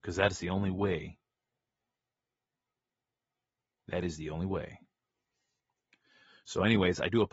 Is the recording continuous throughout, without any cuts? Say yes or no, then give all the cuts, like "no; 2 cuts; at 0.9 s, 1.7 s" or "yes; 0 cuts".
yes; 0 cuts